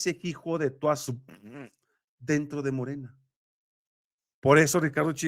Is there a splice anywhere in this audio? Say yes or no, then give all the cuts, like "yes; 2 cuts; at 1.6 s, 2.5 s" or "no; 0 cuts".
no; 0 cuts